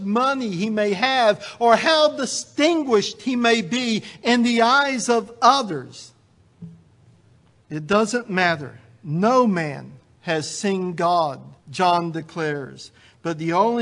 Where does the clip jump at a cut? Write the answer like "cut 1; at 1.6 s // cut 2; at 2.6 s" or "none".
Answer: cut 1; at 7.4 s // cut 2; at 11.6 s